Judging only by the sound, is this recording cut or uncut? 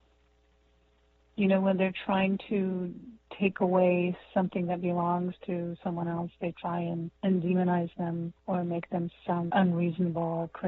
cut